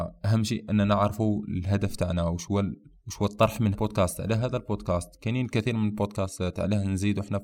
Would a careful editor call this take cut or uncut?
cut